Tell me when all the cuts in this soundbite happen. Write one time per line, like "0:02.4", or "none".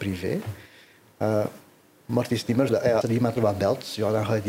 0:02.7
0:03.0
0:03.4